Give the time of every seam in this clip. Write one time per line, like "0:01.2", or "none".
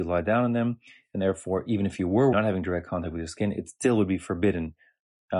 0:02.3